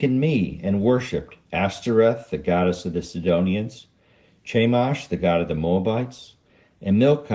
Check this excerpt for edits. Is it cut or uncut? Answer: uncut